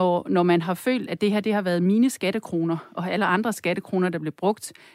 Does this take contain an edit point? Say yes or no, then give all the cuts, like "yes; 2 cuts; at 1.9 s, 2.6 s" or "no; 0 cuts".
no; 0 cuts